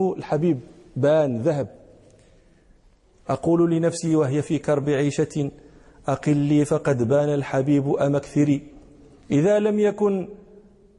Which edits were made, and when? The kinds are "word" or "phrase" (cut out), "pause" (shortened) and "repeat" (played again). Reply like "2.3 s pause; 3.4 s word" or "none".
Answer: none